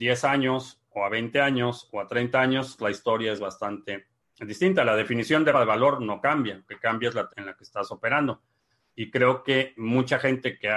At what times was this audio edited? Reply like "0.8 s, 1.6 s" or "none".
2.8 s, 5.5 s, 6.7 s, 7.3 s, 9.8 s